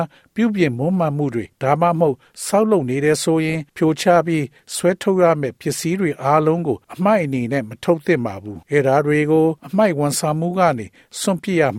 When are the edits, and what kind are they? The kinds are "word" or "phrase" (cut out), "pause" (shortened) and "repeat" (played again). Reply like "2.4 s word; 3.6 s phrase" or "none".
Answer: 1.5 s pause; 3.7 s pause; 6.8 s pause; 8.6 s pause; 9.6 s pause